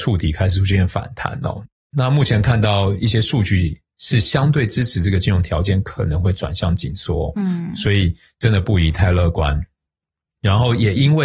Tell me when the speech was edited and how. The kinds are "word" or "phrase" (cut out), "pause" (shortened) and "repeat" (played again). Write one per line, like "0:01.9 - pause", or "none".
none